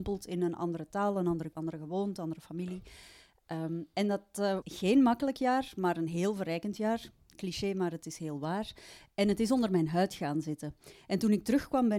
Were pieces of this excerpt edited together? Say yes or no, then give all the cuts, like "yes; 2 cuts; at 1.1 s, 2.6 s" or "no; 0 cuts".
yes; 2 cuts; at 1.5 s, 4.6 s